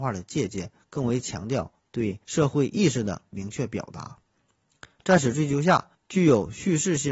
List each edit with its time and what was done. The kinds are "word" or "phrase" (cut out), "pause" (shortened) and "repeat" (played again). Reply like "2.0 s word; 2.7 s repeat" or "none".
2.2 s pause; 5.9 s pause